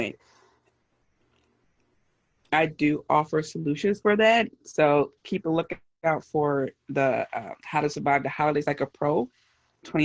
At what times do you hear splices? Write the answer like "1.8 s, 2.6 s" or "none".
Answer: 5.2 s

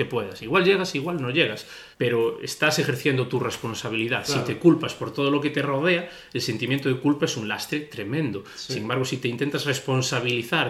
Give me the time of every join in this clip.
1.9 s

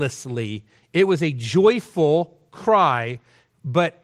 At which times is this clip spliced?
none

